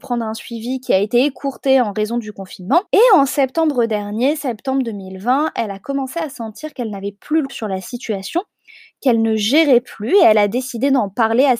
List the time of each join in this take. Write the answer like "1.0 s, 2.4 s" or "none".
2.9 s, 7.5 s

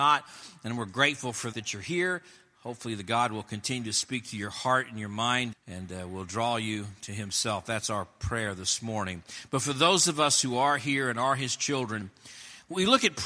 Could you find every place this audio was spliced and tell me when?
1.5 s, 5.5 s

